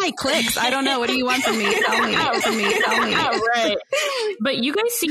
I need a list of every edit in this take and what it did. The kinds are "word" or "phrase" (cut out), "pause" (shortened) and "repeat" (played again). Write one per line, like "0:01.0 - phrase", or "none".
0:02.4 - repeat